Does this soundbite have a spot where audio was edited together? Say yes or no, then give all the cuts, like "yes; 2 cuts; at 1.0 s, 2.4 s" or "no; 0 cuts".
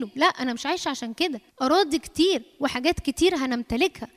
yes; 1 cut; at 1.5 s